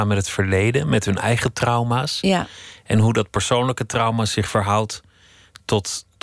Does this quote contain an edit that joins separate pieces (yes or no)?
no